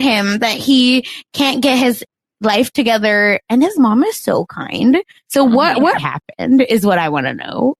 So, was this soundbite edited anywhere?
yes; 1 cut; at 6.0 s

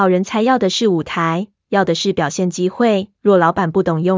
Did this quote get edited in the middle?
yes; 1 cut; at 3.1 s

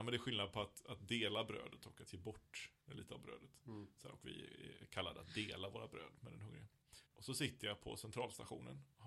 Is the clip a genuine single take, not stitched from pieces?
no; 1 cut; at 7.1 s

